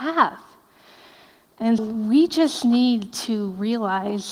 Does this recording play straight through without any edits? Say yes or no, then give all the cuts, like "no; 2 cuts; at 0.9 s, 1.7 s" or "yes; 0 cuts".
no; 1 cut; at 1.8 s